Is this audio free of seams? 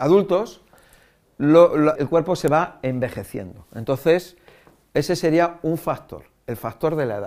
no; 1 cut; at 2.0 s

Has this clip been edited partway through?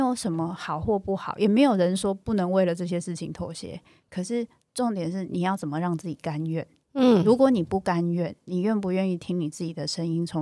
no; 0 cuts

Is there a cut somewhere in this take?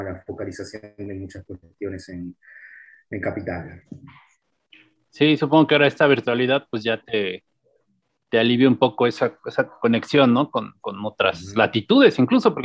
no; 0 cuts

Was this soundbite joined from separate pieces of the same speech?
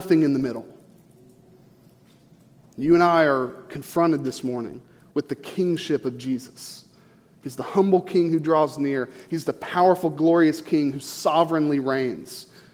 no; 0 cuts

